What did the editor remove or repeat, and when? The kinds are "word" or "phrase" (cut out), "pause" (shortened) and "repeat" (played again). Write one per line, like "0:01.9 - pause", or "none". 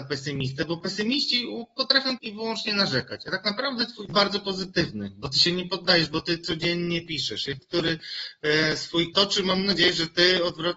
0:02.2 - word
0:04.1 - phrase
0:07.6 - phrase
0:09.1 - word